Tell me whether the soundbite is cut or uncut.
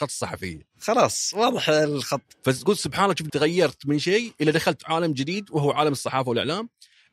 cut